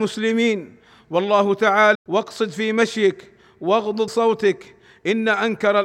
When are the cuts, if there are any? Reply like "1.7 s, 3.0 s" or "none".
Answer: 1.9 s, 4.1 s

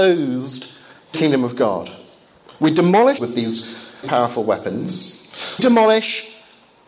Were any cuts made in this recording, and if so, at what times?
1.1 s, 3.2 s, 4.0 s, 5.6 s

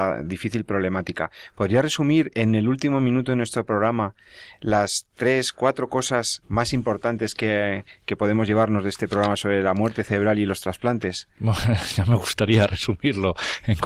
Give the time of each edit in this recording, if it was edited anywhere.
6.4 s

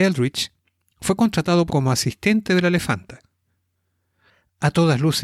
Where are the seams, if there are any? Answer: 1.7 s

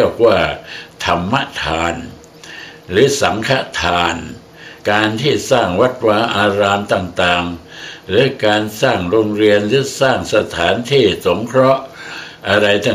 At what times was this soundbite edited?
4.8 s

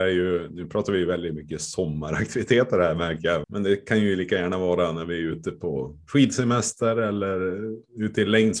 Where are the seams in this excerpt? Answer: 3.4 s

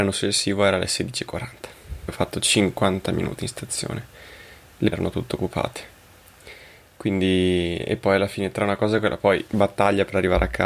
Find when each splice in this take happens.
2.1 s, 4.9 s

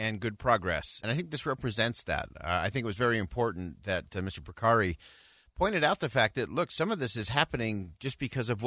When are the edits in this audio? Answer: 1.0 s

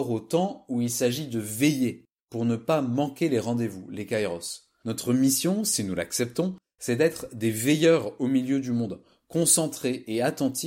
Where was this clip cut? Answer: none

